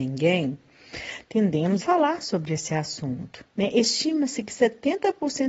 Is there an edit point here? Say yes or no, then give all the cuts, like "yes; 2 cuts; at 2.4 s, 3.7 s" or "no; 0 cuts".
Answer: yes; 2 cuts; at 1.8 s, 3.5 s